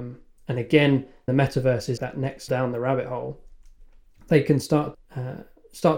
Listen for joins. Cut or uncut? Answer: cut